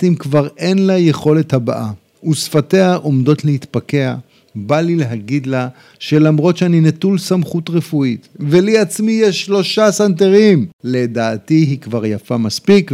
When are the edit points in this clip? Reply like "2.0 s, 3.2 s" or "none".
none

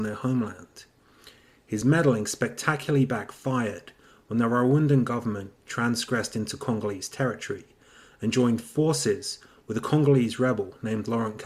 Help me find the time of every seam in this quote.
none

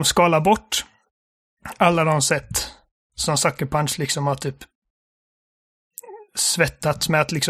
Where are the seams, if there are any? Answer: 2.9 s

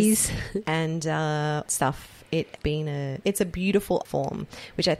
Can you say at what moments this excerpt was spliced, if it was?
1.7 s, 2.6 s, 3.2 s, 4.1 s

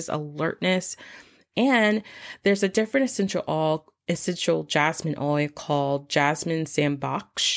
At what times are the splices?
none

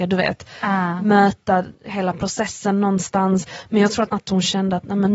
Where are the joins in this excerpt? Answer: 1.7 s, 4.1 s

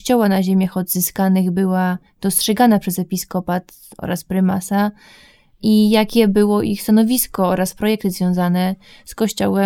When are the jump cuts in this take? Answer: none

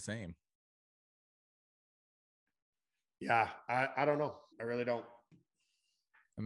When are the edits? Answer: 4.5 s

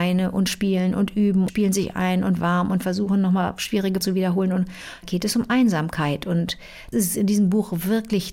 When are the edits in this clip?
1.5 s, 4.0 s, 5.0 s, 6.9 s

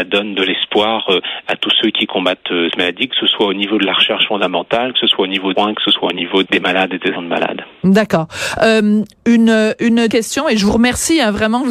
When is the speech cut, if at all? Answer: 2.7 s, 5.5 s, 6.4 s, 7.1 s, 10.1 s

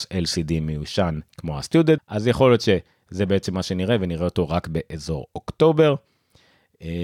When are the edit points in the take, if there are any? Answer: 1.3 s, 2.0 s

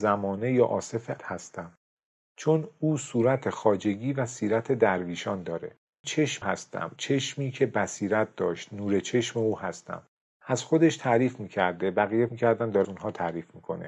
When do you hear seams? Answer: 1.2 s, 6.0 s, 6.4 s, 7.0 s, 12.3 s, 12.8 s

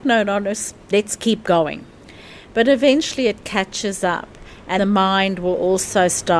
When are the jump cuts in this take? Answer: 4.8 s

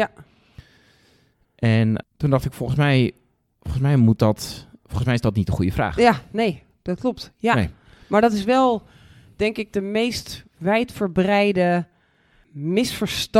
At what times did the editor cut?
none

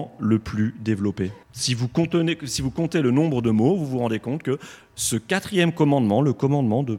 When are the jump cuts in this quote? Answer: 1.4 s

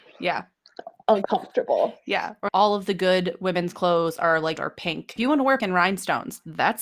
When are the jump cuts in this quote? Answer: 2.5 s, 4.6 s, 5.2 s, 5.6 s

